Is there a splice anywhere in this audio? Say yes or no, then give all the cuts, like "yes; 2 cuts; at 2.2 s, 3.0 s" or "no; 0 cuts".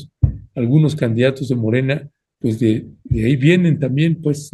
no; 0 cuts